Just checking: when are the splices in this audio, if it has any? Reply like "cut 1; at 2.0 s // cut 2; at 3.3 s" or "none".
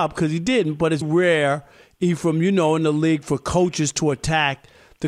cut 1; at 1.0 s

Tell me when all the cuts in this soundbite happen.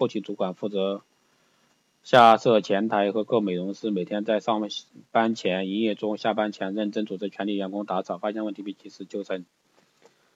none

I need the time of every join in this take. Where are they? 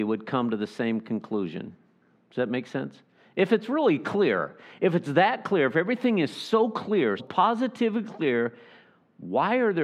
cut 1; at 7.2 s

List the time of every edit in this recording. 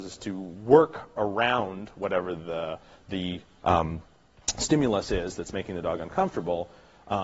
none

